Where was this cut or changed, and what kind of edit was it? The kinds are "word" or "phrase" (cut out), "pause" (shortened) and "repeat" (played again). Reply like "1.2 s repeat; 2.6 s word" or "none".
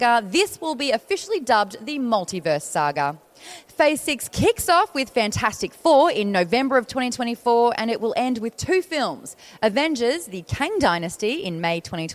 none